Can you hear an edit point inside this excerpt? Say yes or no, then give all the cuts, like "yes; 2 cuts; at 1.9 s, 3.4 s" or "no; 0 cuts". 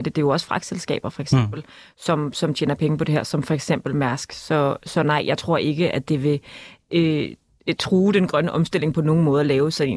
no; 0 cuts